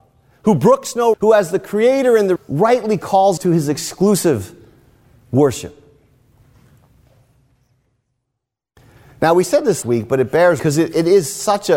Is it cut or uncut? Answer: cut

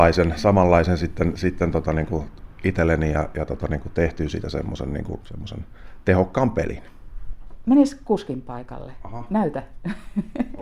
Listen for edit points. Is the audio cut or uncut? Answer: cut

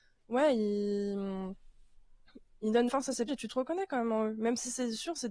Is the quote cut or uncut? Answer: cut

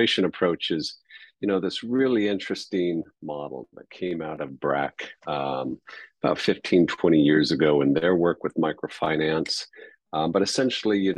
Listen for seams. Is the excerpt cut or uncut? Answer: cut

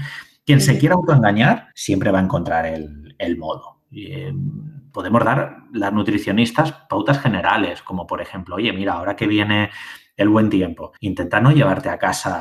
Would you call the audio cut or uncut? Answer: cut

